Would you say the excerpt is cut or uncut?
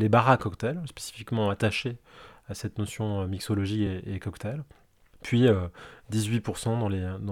uncut